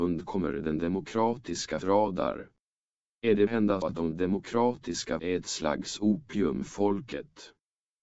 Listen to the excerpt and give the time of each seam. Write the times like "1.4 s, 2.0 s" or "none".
1.8 s, 3.5 s, 3.8 s, 5.2 s, 6.7 s

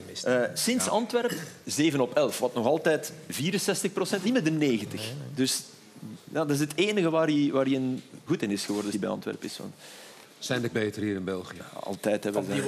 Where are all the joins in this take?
4.2 s, 8.3 s, 8.9 s, 10.2 s, 10.7 s

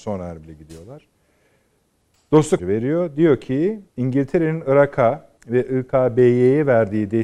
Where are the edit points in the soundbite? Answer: 2.6 s, 3.9 s, 5.4 s

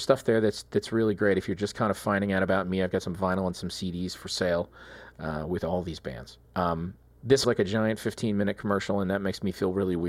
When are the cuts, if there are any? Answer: 6.4 s, 7.4 s

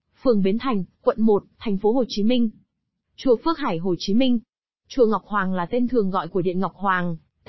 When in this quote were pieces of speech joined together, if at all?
none

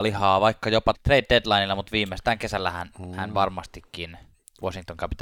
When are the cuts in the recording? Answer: 0.9 s

